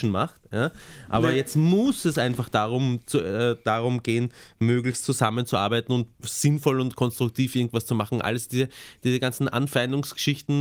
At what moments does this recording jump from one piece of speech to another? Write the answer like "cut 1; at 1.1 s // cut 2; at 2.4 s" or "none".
none